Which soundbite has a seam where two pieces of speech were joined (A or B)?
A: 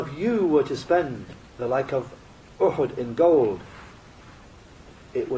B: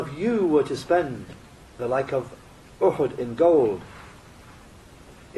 A